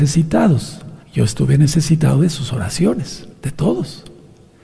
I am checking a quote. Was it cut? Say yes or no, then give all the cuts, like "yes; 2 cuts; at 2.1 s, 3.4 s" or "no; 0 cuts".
yes; 2 cuts; at 1.0 s, 3.3 s